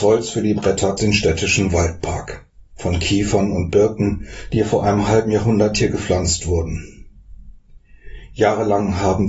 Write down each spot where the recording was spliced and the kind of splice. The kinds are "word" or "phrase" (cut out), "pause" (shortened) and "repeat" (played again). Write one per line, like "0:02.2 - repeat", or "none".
0:01.0 - phrase
0:02.7 - pause